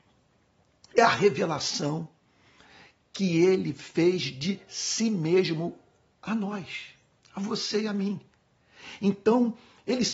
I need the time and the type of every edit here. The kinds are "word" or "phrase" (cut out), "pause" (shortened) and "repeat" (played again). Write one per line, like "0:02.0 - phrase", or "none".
none